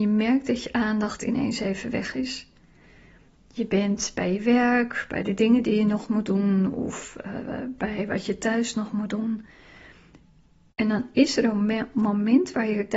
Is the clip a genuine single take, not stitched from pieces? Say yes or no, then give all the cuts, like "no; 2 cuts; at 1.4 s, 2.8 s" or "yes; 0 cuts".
yes; 0 cuts